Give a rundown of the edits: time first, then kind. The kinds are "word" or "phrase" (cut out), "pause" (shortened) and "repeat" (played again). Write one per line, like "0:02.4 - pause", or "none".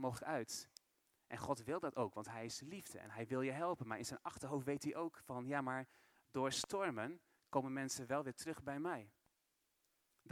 none